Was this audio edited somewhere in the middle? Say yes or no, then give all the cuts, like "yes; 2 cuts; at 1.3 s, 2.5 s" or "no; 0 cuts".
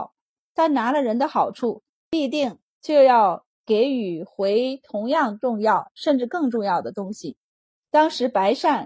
no; 0 cuts